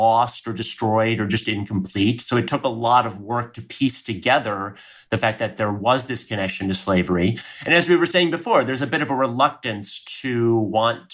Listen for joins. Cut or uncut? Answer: uncut